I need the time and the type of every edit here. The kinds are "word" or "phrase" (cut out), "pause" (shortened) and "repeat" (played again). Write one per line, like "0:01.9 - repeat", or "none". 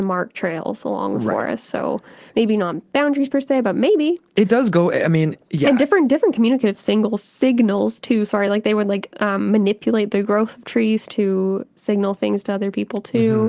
none